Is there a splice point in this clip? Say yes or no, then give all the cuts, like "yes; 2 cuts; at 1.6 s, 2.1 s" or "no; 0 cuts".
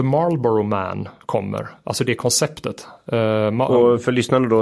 no; 0 cuts